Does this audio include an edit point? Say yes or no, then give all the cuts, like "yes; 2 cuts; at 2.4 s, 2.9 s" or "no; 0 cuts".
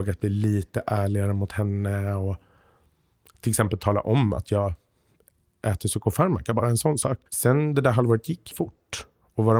yes; 2 cuts; at 7.3 s, 8.5 s